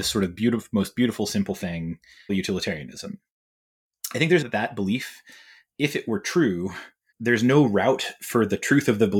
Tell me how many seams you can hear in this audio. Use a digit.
3